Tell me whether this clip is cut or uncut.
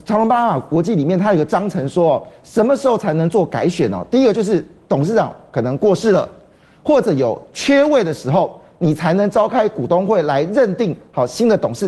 uncut